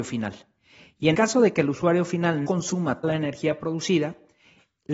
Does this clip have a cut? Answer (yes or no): yes